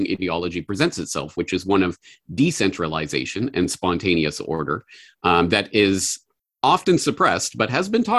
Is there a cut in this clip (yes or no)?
no